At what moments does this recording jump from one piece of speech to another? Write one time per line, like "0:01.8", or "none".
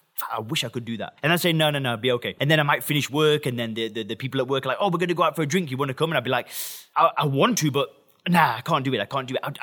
none